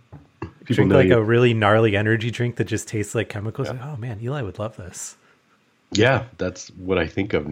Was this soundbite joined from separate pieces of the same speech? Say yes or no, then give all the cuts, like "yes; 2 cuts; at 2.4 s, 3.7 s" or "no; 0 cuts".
no; 0 cuts